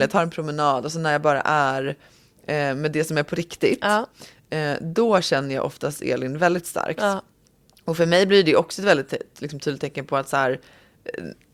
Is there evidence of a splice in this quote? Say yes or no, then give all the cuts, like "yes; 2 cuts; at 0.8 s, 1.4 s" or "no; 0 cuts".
no; 0 cuts